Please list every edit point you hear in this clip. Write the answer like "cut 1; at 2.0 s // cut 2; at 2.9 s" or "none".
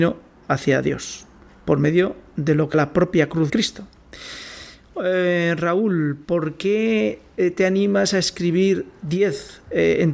cut 1; at 2.7 s // cut 2; at 3.5 s